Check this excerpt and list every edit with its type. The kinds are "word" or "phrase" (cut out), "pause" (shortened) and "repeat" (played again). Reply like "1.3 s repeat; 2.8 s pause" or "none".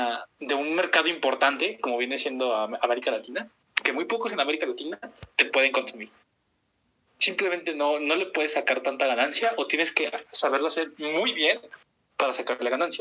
none